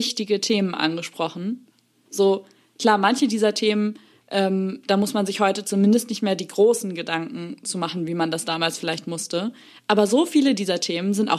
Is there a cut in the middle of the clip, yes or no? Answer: no